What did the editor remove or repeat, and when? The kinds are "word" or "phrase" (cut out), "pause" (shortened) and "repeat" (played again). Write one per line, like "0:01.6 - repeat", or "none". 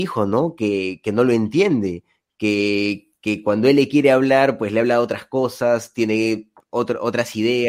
none